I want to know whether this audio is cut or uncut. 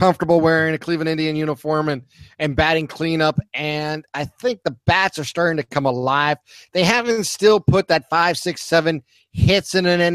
uncut